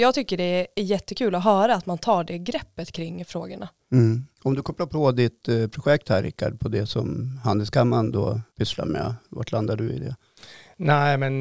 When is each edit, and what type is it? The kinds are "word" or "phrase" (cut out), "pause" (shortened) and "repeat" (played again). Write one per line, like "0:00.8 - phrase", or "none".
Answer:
0:04.3 - pause
0:08.5 - pause